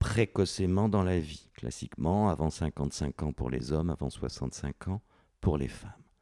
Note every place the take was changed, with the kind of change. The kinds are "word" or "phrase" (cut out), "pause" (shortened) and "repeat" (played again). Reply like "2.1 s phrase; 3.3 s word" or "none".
1.5 s pause